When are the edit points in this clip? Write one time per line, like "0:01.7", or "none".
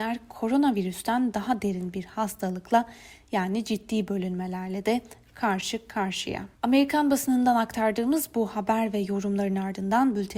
0:06.5